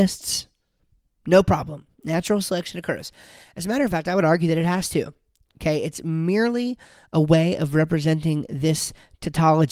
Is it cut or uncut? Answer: uncut